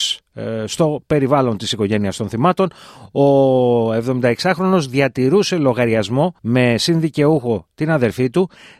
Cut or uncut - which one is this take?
cut